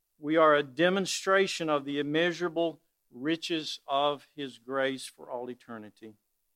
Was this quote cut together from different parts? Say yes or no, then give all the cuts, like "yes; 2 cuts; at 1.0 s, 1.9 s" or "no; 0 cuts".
no; 0 cuts